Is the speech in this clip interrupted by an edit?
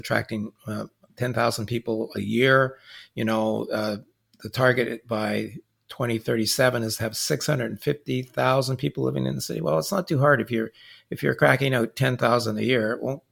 no; 0 cuts

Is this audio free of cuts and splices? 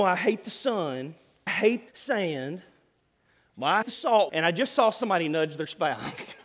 no; 4 cuts; at 1.5 s, 1.9 s, 3.8 s, 4.3 s

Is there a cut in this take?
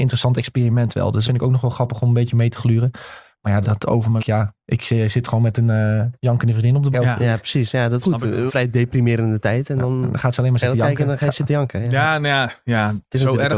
yes; 8 cuts; at 1.2 s, 3.6 s, 4.2 s, 4.6 s, 6.2 s, 6.9 s, 8.0 s, 8.5 s

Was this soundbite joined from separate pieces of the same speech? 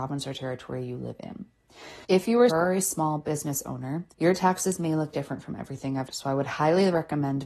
yes; 5 cuts; at 2.0 s, 2.5 s, 4.1 s, 5.1 s, 6.1 s

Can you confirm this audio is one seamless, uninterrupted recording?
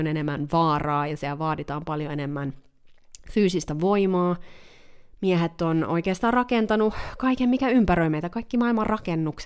yes; 0 cuts

